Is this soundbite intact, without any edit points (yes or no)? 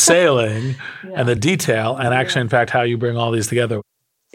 yes